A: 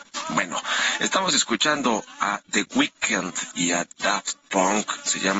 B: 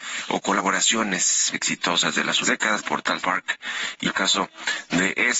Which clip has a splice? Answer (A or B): B